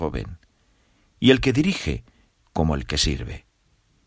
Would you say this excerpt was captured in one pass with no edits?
yes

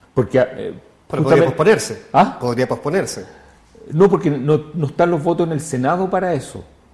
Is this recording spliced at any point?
no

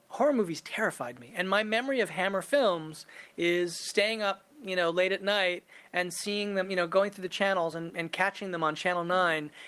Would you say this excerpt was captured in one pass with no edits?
yes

